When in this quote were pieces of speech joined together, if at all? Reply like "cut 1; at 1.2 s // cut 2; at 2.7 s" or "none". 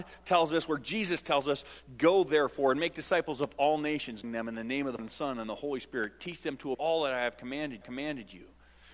cut 1; at 4.2 s // cut 2; at 5.0 s // cut 3; at 6.7 s // cut 4; at 7.8 s